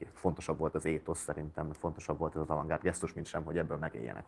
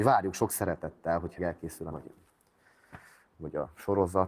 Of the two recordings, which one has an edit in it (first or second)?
second